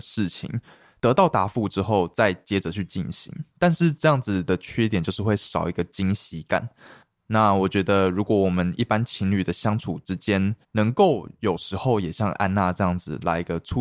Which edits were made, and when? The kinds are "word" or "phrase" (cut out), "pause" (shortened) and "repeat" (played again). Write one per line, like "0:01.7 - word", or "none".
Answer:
0:10.6 - pause